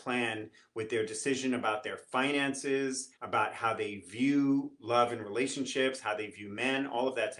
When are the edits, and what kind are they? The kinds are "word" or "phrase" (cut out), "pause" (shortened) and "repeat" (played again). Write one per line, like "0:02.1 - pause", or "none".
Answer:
0:03.1 - pause